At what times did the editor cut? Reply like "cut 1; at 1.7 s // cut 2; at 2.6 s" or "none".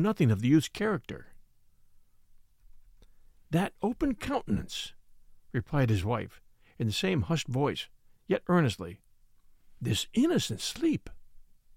none